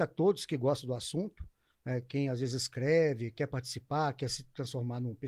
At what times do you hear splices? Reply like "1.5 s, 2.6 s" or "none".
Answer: none

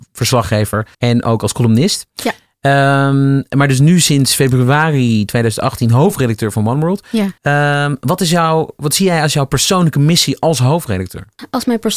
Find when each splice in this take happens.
0.9 s, 7.4 s

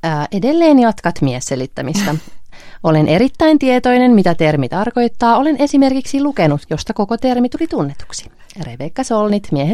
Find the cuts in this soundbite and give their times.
6.7 s

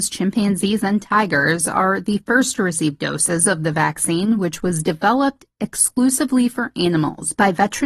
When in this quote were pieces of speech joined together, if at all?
none

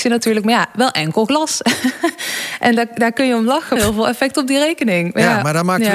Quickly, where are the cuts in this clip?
3.8 s

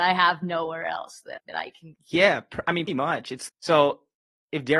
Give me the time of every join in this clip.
1.4 s, 2.0 s, 2.9 s, 3.5 s

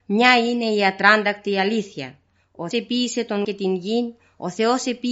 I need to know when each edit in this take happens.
2.7 s, 3.4 s

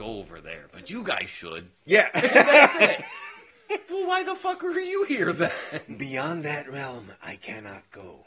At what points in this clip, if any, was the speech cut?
3.9 s

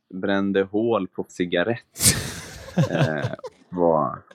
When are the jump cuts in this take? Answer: 1.3 s

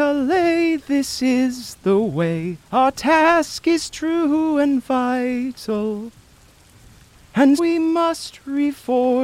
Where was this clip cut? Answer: 2.6 s, 7.6 s

